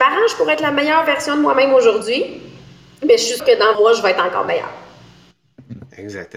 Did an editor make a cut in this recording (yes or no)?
yes